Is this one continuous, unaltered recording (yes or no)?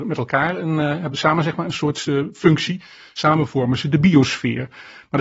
yes